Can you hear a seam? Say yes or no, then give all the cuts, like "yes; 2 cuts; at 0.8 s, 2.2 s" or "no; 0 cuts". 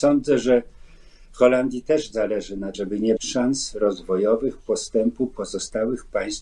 yes; 2 cuts; at 2.7 s, 3.2 s